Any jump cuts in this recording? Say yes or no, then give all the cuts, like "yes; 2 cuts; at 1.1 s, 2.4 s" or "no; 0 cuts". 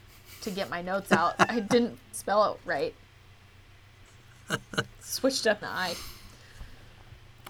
yes; 2 cuts; at 2.1 s, 5.6 s